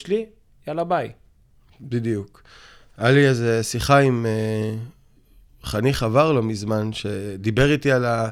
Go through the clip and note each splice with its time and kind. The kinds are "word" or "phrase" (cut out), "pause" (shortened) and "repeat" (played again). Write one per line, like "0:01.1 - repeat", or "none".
none